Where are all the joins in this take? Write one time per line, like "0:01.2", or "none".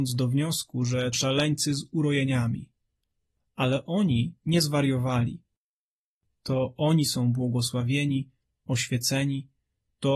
0:01.1